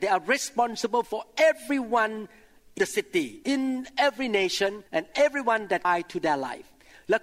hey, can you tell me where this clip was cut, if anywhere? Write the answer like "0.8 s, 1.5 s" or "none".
2.8 s, 3.4 s, 4.9 s, 5.8 s

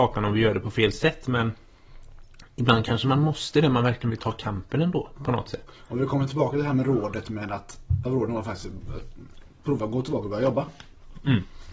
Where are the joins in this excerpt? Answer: 8.1 s

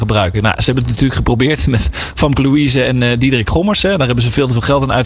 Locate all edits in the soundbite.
none

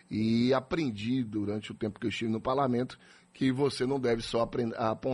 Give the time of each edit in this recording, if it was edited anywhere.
none

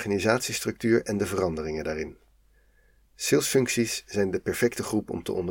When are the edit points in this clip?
none

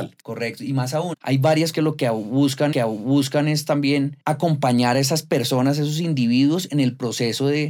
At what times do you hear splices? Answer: 1.1 s, 1.7 s, 2.7 s

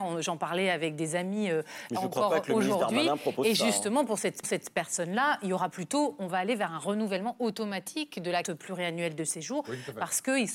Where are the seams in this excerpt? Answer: 1.9 s, 4.4 s, 8.4 s

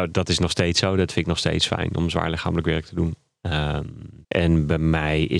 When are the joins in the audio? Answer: 4.2 s

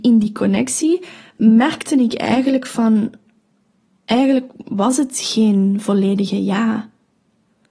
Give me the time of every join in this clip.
none

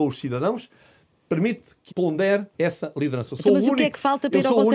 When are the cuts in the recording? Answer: 1.9 s, 2.5 s

